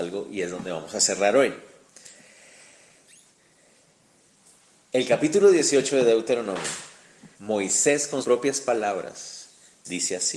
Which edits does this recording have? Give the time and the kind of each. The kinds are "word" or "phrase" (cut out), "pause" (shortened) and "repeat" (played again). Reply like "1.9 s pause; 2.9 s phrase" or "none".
7.3 s pause; 8.2 s word